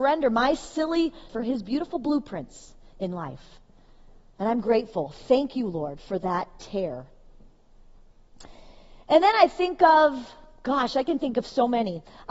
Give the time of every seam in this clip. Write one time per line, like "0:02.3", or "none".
0:01.3